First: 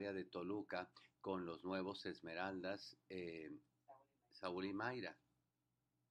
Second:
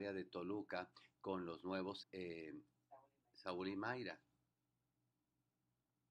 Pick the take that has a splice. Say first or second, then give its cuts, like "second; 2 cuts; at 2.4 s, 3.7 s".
second; 1 cut; at 2.0 s